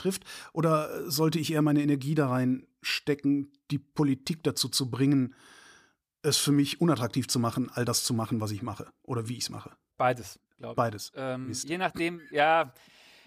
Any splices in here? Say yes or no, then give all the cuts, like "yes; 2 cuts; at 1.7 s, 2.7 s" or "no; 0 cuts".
no; 0 cuts